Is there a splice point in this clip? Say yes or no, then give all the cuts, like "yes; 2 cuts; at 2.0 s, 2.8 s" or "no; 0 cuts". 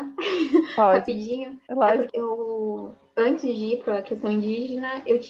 yes; 1 cut; at 2.1 s